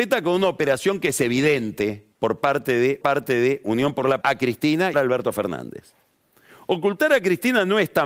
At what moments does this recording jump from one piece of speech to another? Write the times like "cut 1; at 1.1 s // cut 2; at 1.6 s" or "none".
cut 1; at 2.1 s // cut 2; at 3.0 s // cut 3; at 4.2 s // cut 4; at 4.9 s